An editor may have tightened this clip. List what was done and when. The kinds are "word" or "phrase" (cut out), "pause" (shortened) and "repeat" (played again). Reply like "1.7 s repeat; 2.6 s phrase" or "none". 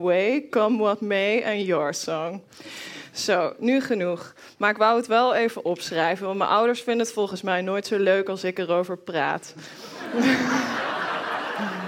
none